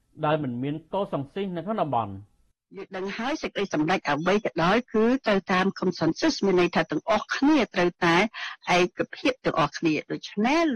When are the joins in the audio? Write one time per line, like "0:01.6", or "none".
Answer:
none